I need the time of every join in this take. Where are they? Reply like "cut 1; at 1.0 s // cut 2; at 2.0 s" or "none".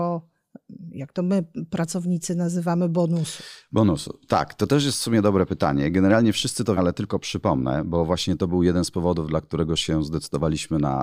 cut 1; at 6.8 s